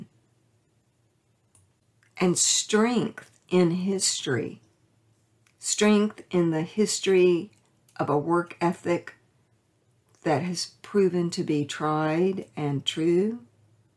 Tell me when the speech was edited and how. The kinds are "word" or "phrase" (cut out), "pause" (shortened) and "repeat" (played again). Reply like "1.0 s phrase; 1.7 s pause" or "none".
none